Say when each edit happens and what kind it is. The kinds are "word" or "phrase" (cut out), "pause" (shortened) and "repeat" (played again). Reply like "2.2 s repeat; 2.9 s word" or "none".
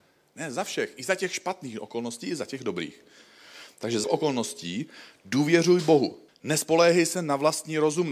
4.0 s word; 6.3 s pause

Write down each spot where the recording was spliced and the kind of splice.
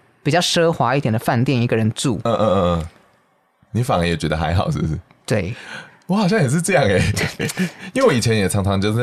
none

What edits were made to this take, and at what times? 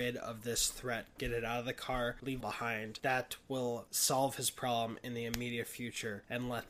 2.4 s phrase

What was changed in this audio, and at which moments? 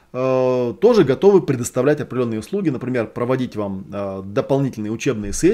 none

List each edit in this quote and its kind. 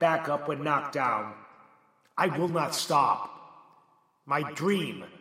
none

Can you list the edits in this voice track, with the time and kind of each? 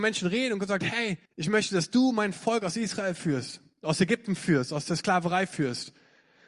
1.2 s pause

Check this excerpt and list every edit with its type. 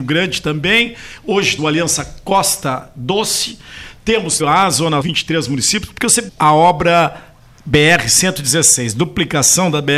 1.6 s word; 4.4 s word; 5.0 s word; 6.3 s word

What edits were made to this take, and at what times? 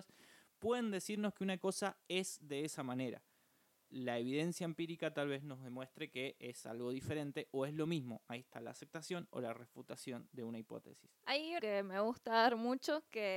11.2 s pause; 11.6 s word

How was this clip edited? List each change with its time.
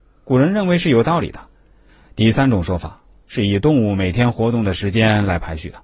1.9 s pause

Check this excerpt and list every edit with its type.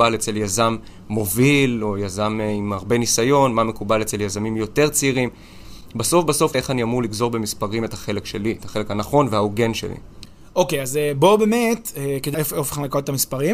12.3 s word

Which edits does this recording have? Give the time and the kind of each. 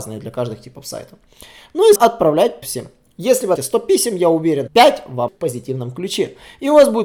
2.0 s word; 2.6 s word; 3.6 s word; 4.7 s word; 5.3 s word

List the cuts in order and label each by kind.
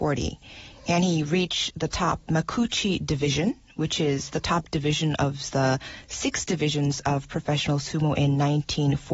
none

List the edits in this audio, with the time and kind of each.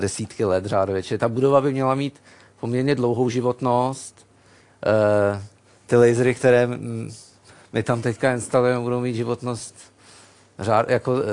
none

